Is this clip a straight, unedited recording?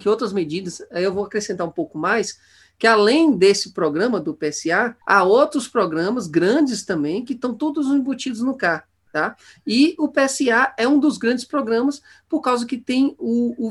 no; 1 cut; at 5.0 s

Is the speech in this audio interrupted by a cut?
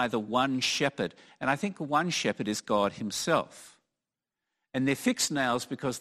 no; 0 cuts

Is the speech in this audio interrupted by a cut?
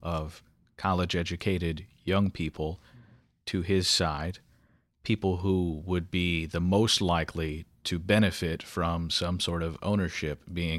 no; 0 cuts

